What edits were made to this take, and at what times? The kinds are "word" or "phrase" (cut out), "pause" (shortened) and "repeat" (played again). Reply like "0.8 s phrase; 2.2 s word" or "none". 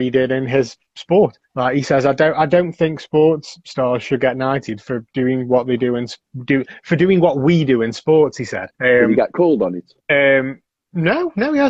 1.4 s pause; 8.7 s pause; 10.0 s pause